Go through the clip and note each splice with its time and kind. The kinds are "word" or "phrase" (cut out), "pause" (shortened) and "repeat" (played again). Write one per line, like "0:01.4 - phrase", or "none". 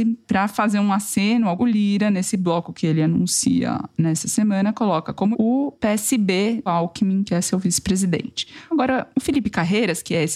0:01.6 - word
0:05.3 - word
0:06.7 - word